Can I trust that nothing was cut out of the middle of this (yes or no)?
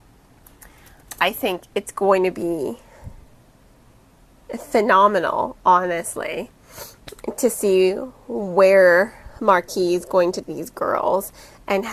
no